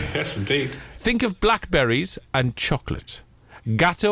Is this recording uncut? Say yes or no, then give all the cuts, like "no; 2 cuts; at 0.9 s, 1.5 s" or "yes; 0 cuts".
yes; 0 cuts